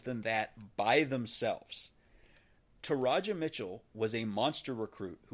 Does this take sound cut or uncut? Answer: uncut